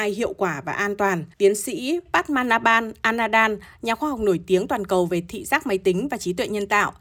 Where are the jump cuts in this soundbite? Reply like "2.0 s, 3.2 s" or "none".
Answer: 1.3 s